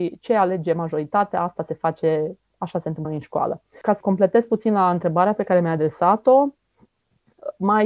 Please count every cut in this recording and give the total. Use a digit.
2